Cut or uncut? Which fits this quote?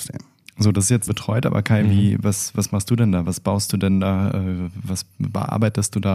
cut